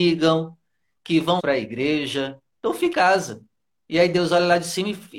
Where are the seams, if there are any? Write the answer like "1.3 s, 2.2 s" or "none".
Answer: 1.4 s, 2.9 s